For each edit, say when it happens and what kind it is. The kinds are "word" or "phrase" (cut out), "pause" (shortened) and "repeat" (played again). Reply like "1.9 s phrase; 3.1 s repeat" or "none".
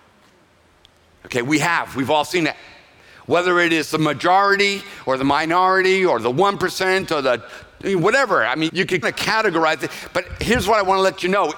8.7 s word; 9.0 s word